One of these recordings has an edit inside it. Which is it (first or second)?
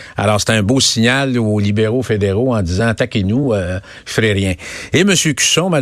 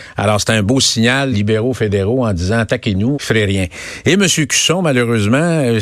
second